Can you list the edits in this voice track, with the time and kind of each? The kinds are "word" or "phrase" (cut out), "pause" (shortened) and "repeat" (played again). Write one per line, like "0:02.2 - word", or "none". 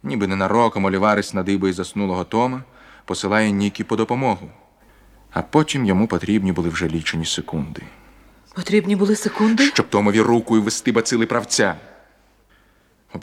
0:09.9 - word